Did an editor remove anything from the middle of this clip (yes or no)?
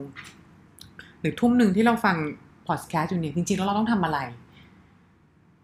no